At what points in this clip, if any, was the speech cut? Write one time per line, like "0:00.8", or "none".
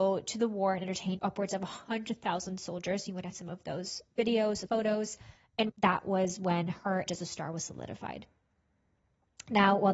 0:01.2
0:03.3
0:04.7
0:05.7
0:07.1